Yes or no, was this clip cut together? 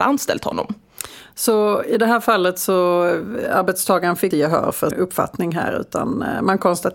yes